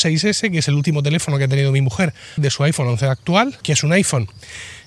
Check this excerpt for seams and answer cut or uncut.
cut